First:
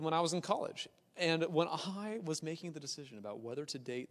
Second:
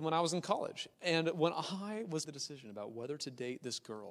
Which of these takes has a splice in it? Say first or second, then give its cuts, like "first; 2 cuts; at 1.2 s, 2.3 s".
second; 2 cuts; at 0.9 s, 2.2 s